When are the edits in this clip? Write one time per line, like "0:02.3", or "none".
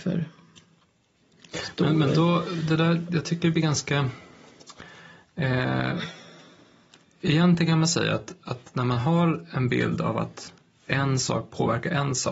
none

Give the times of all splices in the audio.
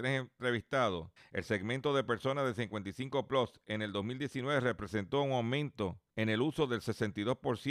0:01.2
0:06.1

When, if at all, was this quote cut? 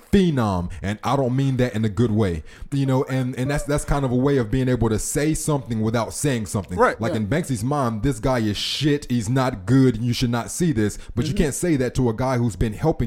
none

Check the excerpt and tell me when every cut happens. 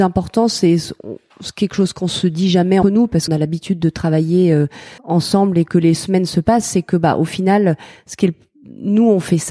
0:02.8
0:03.3
0:05.0

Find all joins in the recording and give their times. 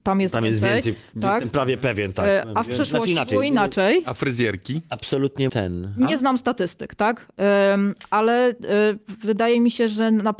0:05.5

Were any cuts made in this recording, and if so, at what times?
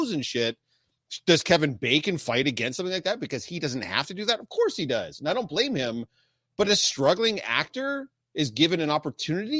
none

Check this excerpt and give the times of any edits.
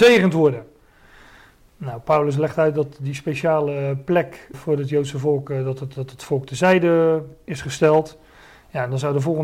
0:04.5

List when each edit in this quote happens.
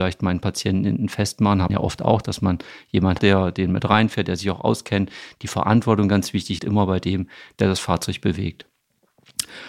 0:01.7
0:03.2
0:06.6

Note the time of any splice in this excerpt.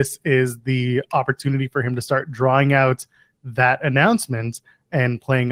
none

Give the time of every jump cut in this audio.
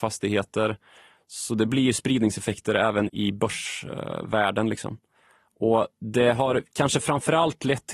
0:03.1

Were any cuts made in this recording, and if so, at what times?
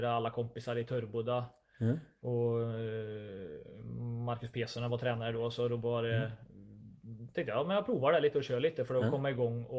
none

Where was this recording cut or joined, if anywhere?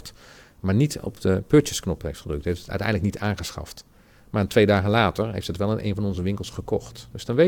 none

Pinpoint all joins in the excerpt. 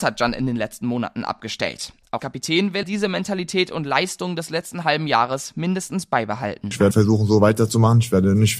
0:02.2
0:02.8
0:06.9

